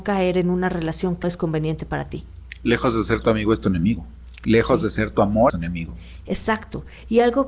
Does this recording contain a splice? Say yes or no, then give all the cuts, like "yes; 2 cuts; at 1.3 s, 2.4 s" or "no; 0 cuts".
yes; 2 cuts; at 1.2 s, 5.5 s